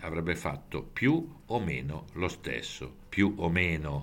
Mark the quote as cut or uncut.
uncut